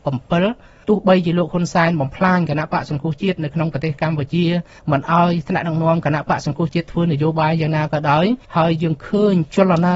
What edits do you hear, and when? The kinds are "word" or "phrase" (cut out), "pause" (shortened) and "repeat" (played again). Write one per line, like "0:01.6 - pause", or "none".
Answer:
0:08.4 - pause